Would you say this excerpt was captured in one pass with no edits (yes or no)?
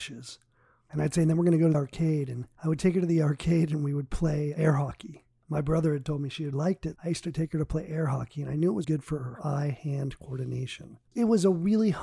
no